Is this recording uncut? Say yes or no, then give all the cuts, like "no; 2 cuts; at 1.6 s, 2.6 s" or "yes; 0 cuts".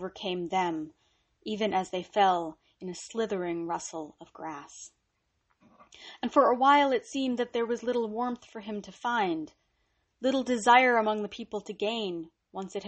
yes; 0 cuts